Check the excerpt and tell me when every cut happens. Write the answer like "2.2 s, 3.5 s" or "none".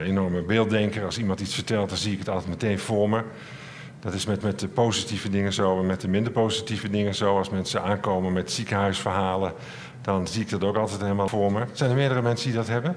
4.4 s, 11.3 s